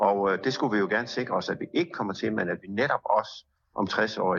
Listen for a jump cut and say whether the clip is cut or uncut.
uncut